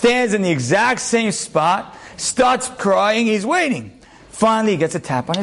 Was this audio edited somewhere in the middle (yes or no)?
yes